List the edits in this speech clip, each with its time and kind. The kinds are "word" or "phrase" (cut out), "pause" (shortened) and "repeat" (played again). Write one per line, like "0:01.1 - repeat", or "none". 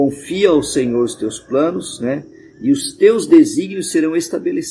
none